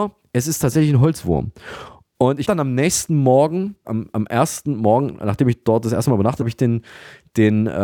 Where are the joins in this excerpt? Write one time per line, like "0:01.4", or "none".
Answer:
0:02.4
0:03.8
0:06.4